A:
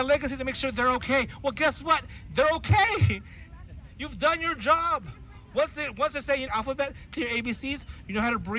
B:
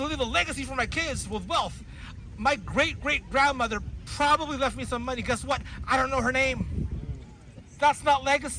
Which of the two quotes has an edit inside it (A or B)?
A